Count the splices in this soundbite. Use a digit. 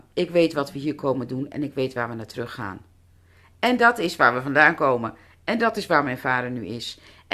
0